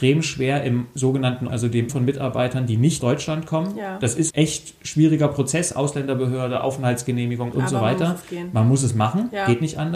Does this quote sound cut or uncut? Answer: cut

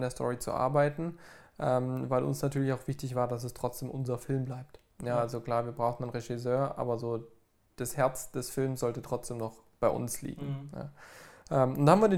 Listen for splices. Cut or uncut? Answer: uncut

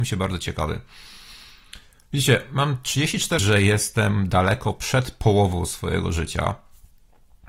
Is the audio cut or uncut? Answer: cut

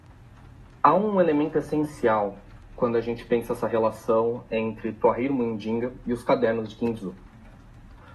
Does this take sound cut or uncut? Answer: uncut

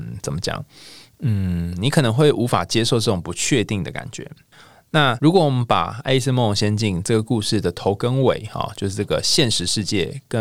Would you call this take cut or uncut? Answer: uncut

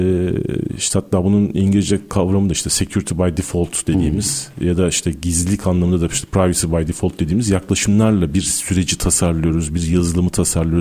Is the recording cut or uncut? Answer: uncut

